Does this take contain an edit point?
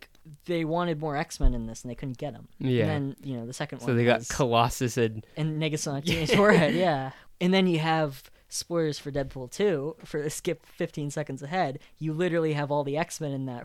no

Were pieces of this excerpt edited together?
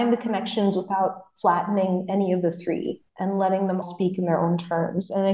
yes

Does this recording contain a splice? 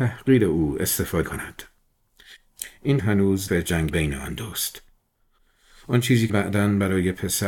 yes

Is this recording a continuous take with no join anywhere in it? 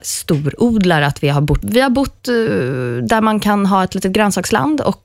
no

